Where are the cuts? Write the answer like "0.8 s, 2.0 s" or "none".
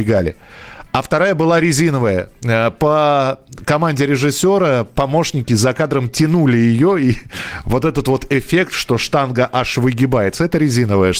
none